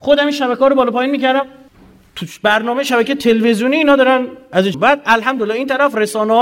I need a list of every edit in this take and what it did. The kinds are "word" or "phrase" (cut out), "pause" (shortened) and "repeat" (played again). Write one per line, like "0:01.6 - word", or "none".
0:01.7 - pause
0:04.7 - word